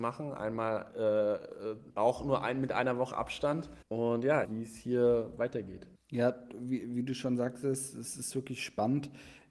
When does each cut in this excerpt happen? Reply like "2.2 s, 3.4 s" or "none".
1.9 s, 3.8 s, 4.4 s, 6.0 s